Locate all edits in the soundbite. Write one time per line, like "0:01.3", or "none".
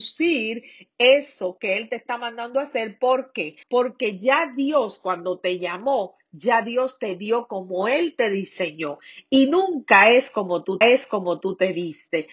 0:03.6
0:10.8